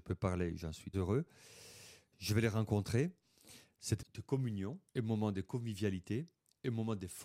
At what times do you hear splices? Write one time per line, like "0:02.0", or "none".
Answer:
0:00.9
0:04.0
0:04.9